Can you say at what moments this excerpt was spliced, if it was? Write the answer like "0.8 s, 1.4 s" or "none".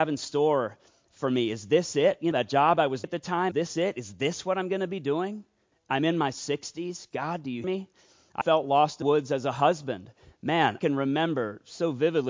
2.3 s, 3.0 s, 3.5 s, 5.7 s, 7.6 s, 8.4 s, 9.0 s, 10.8 s